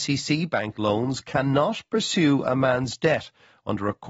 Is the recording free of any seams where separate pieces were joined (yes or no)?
yes